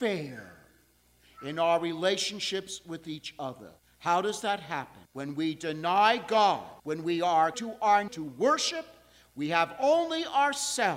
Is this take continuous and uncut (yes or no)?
no